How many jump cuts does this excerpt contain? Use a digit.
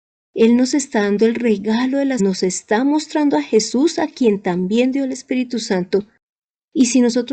1